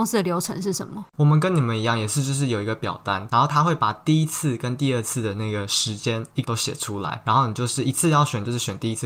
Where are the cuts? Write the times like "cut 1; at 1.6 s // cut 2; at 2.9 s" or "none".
cut 1; at 6.4 s

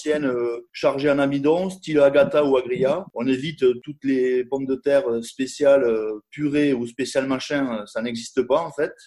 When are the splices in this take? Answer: none

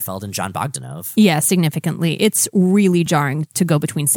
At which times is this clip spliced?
none

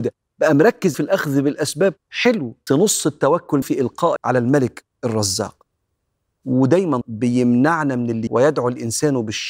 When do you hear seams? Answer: cut 1; at 0.9 s // cut 2; at 2.7 s // cut 3; at 3.6 s // cut 4; at 4.2 s // cut 5; at 7.0 s // cut 6; at 8.3 s

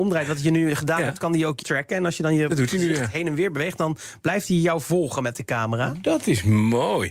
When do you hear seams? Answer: cut 1; at 1.6 s

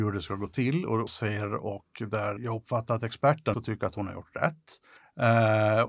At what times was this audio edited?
cut 1; at 1.1 s // cut 2; at 2.4 s // cut 3; at 3.5 s // cut 4; at 5.0 s

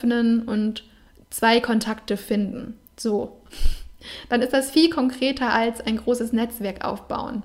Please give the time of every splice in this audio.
cut 1; at 2.8 s

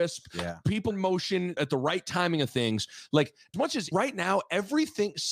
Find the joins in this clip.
cut 1; at 0.9 s // cut 2; at 1.6 s // cut 3; at 3.5 s // cut 4; at 3.9 s

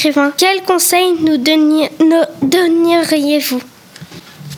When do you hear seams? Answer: none

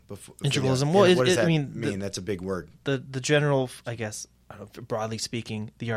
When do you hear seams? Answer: none

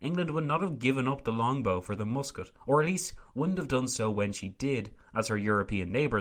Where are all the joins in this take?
none

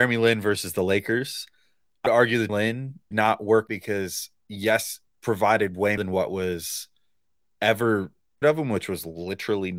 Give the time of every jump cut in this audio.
cut 1; at 2.1 s // cut 2; at 2.5 s // cut 3; at 3.1 s // cut 4; at 3.7 s // cut 5; at 5.1 s // cut 6; at 6.0 s // cut 7; at 8.4 s

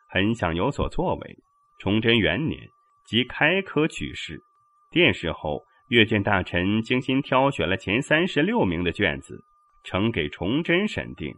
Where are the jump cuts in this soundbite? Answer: none

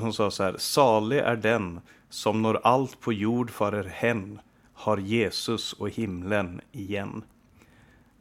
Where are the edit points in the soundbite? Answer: none

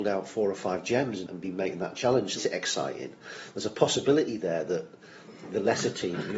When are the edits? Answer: cut 1; at 1.3 s // cut 2; at 2.4 s

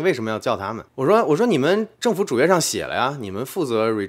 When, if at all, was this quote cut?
cut 1; at 1.9 s

